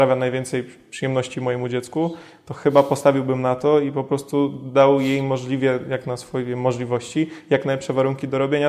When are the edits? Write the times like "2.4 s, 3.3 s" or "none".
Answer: none